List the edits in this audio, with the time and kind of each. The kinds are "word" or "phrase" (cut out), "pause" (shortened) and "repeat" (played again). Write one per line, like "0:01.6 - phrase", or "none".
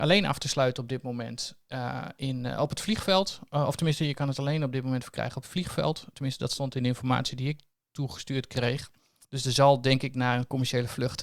none